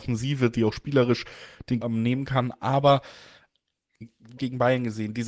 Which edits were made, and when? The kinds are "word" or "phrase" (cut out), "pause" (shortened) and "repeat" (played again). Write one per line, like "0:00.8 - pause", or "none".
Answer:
0:01.8 - word
0:04.4 - phrase